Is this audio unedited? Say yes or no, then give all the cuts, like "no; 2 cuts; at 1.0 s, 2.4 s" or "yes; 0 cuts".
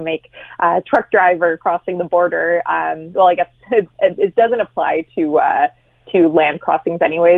yes; 0 cuts